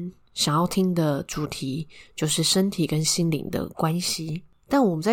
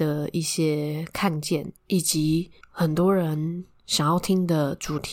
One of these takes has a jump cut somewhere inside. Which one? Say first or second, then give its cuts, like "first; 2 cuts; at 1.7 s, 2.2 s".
second; 1 cut; at 1.8 s